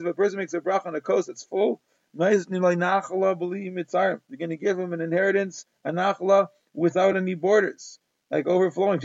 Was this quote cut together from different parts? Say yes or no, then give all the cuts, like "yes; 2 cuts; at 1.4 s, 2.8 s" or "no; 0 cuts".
no; 0 cuts